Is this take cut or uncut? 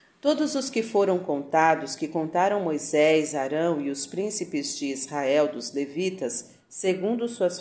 uncut